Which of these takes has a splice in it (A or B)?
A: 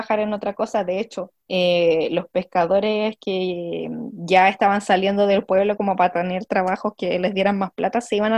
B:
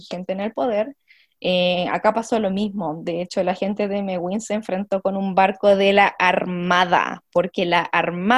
A